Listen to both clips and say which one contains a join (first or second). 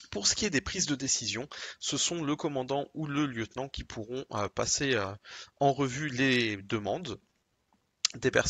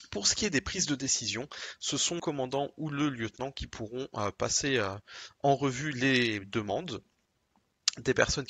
second